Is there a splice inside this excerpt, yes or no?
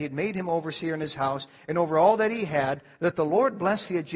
no